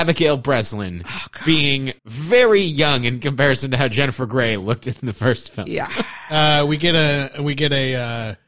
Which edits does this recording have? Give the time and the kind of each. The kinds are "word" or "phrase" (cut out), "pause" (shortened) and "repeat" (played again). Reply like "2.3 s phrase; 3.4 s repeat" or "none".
2.0 s pause